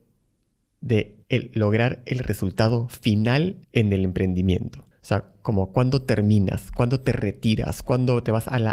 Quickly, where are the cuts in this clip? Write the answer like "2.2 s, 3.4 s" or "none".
1.2 s, 3.6 s, 4.9 s